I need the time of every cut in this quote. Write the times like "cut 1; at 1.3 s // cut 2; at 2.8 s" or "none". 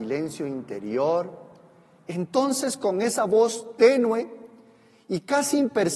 none